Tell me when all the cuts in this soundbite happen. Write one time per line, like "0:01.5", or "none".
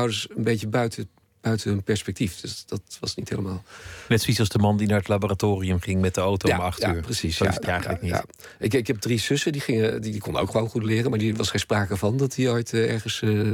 0:07.6